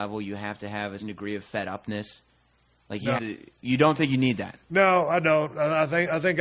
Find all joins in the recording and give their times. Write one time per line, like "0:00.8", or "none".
0:01.0
0:03.2

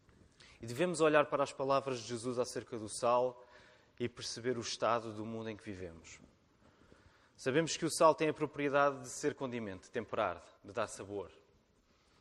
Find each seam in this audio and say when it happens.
none

